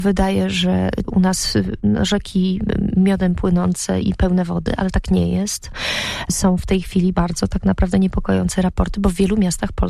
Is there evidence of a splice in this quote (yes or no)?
yes